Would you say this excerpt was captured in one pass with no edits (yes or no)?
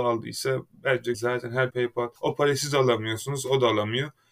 no